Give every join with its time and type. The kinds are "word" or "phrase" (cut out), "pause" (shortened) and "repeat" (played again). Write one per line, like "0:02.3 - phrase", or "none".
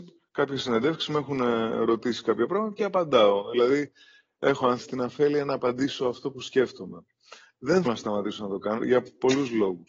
0:04.8 - word
0:07.8 - word
0:08.8 - word